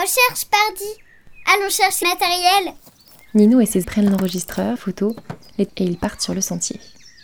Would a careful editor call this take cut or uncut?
cut